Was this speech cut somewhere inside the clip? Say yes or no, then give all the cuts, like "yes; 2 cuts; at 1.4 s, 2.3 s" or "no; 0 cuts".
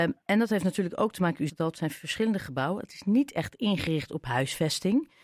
yes; 1 cut; at 1.5 s